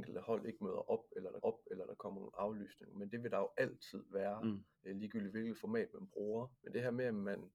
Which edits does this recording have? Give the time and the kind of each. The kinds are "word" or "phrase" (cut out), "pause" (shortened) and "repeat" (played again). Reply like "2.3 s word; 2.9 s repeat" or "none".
1.4 s repeat; 4.7 s pause; 6.6 s pause